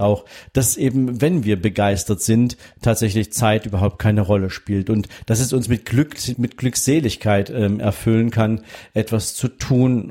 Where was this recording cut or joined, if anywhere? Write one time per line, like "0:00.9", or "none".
0:06.3

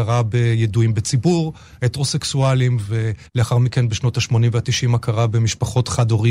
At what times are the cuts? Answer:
0:03.3

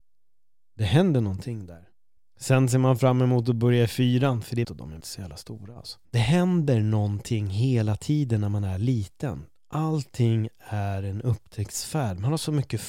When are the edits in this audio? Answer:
0:02.2
0:04.6
0:05.0
0:06.0

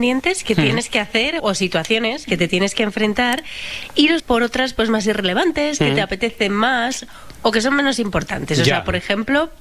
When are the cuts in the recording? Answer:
0:01.4
0:02.3
0:04.2

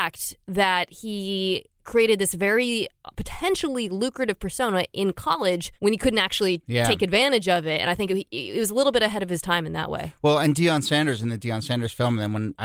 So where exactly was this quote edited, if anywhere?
0:05.8

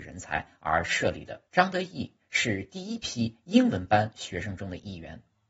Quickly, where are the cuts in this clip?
0:01.5

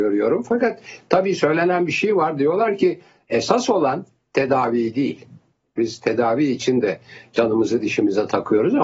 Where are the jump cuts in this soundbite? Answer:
none

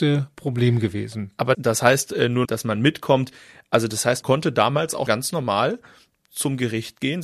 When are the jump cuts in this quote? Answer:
0:01.5
0:02.4
0:04.2
0:05.1

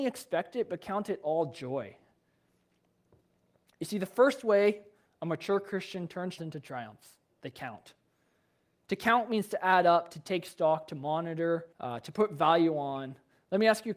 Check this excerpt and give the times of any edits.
0:06.4
0:11.7

